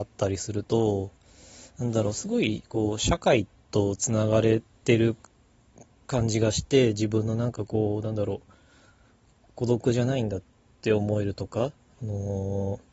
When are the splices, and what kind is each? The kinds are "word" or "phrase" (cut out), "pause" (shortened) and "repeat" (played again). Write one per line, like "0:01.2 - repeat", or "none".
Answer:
none